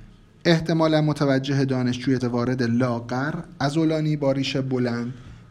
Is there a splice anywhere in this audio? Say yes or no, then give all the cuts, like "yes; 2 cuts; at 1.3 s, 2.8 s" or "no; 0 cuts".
yes; 1 cut; at 2.2 s